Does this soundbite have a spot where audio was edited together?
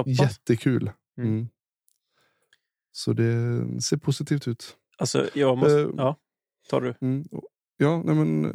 no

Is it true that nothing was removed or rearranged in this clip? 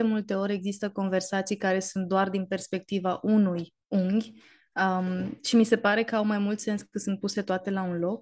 no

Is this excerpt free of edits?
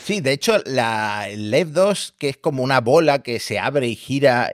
yes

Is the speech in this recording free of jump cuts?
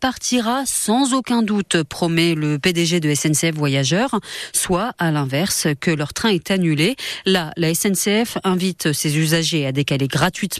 yes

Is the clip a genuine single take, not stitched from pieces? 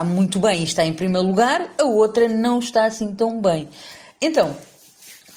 yes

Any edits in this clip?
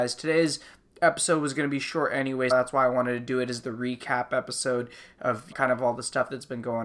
yes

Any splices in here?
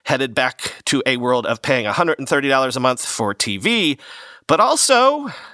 no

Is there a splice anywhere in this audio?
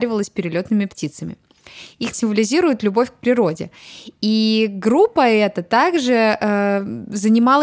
yes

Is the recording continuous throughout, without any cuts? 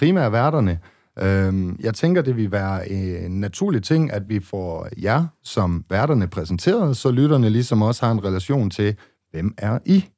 yes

